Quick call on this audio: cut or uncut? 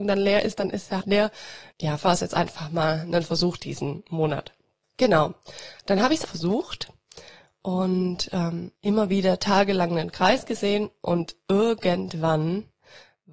cut